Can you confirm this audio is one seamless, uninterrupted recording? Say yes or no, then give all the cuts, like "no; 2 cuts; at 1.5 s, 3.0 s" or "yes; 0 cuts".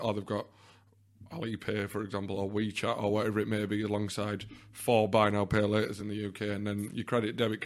yes; 0 cuts